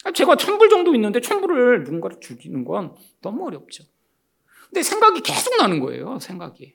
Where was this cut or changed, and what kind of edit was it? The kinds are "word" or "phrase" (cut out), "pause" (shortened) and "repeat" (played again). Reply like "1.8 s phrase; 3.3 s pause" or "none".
none